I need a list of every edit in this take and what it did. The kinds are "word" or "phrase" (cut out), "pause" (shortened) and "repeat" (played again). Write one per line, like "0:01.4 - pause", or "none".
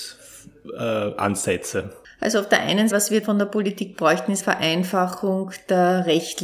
0:02.9 - word
0:03.2 - word
0:04.4 - word